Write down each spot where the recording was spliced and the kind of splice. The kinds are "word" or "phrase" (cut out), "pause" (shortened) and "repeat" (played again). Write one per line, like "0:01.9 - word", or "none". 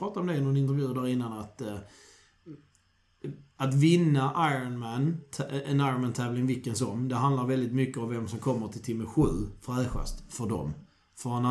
none